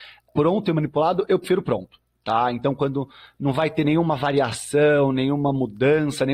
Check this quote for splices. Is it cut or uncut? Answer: uncut